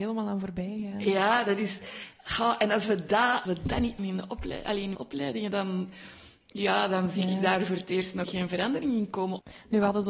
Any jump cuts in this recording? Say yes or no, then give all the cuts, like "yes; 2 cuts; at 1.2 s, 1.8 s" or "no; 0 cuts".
yes; 4 cuts; at 3.4 s, 4.0 s, 4.9 s, 8.2 s